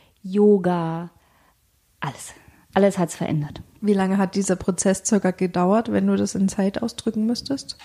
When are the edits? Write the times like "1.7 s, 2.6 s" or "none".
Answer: none